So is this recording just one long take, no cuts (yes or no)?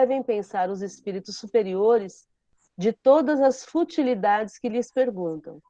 yes